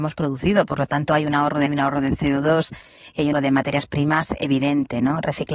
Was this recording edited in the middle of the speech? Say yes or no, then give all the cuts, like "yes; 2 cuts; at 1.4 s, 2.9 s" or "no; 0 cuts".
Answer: yes; 2 cuts; at 1.7 s, 3.3 s